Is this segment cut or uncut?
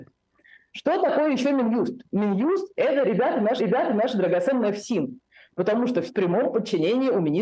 cut